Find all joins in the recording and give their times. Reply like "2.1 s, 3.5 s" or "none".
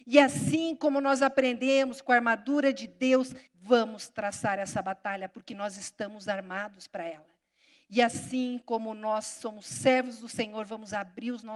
3.5 s